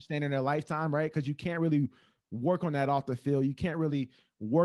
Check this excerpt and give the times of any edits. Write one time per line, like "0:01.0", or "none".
none